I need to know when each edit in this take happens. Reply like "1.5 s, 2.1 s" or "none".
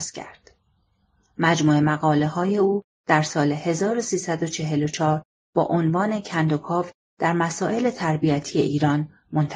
none